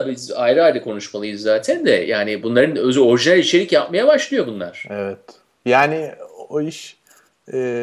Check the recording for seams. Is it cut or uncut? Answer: uncut